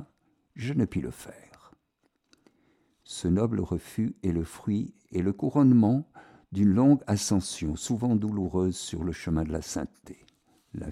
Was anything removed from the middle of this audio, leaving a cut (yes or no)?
no